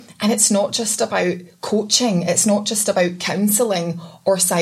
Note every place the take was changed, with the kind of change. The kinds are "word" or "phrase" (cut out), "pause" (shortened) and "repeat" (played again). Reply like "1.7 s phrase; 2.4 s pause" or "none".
none